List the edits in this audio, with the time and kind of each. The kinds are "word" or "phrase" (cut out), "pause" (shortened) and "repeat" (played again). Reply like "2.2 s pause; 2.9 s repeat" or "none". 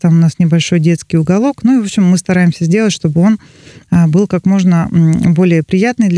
none